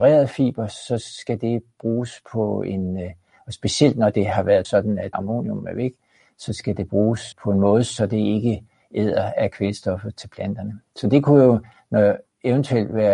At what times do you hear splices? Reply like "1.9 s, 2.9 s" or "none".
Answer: 4.6 s, 5.1 s, 7.3 s